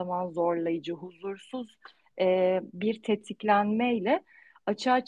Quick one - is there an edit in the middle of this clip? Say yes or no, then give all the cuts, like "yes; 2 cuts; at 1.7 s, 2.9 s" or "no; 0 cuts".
no; 0 cuts